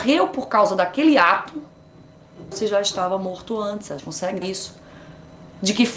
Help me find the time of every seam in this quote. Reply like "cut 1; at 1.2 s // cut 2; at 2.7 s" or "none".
cut 1; at 2.5 s // cut 2; at 4.0 s // cut 3; at 4.4 s